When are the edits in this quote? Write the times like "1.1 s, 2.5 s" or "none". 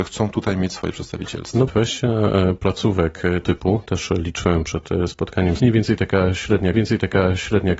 1.7 s, 3.4 s, 5.6 s, 6.7 s